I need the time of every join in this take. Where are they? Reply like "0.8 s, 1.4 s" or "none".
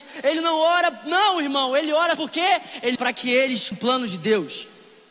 2.2 s, 3.0 s, 3.7 s

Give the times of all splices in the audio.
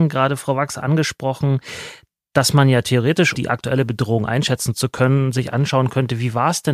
3.3 s

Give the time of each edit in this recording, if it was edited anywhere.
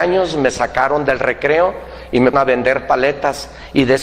2.3 s

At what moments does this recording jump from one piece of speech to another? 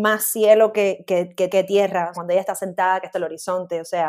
1.1 s, 1.5 s, 2.1 s, 3.1 s

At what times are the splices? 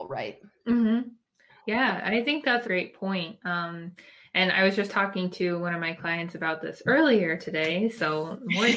2.6 s

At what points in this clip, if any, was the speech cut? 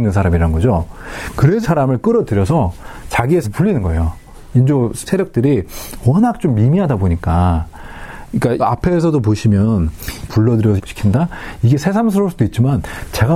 1.6 s, 3.4 s, 5.1 s, 8.6 s, 10.3 s, 10.8 s

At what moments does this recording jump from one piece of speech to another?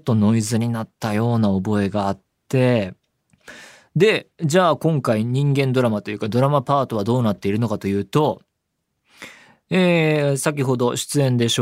none

